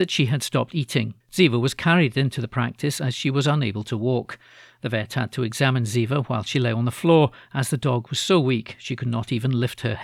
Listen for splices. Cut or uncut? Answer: cut